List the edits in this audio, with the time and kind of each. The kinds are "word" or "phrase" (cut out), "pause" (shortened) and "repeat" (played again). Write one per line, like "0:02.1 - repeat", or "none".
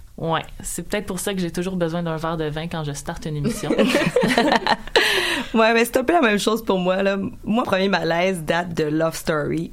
0:07.6 - word